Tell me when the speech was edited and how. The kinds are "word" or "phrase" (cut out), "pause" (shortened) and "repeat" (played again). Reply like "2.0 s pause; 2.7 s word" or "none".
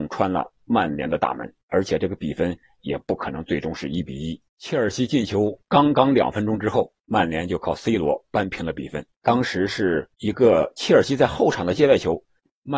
1.6 s pause; 4.5 s pause; 5.6 s pause; 7.0 s pause; 9.1 s pause; 10.1 s pause